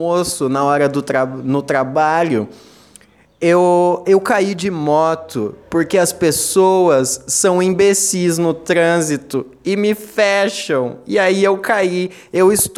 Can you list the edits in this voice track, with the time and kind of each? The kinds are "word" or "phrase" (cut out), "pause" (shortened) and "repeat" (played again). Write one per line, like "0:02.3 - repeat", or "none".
0:04.0 - word